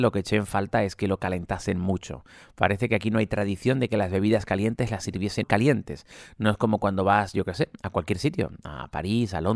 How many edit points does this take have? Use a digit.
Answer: 1